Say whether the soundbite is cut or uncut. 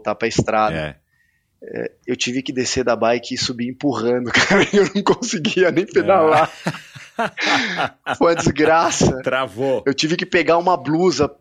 uncut